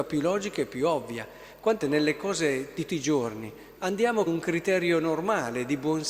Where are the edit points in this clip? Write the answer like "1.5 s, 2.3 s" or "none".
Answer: 1.8 s, 2.9 s, 3.8 s, 4.3 s